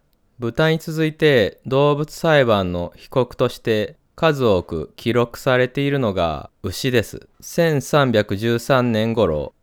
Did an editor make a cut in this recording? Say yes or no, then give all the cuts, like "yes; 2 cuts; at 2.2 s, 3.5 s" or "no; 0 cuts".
yes; 2 cuts; at 6.5 s, 7.3 s